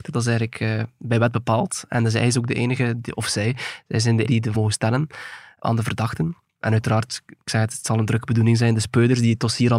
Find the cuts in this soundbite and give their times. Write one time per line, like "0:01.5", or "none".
0:03.1
0:04.2
0:04.5